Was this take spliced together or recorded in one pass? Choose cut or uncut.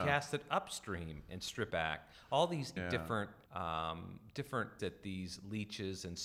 cut